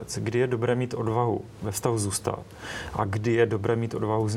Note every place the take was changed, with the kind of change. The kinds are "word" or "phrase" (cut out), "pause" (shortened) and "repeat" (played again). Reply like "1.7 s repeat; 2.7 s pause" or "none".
none